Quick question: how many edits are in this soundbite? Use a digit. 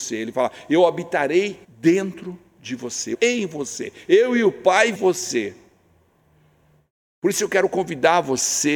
3